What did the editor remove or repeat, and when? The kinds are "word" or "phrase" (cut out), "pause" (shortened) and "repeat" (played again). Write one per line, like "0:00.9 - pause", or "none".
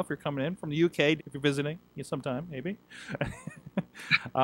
0:01.2 - word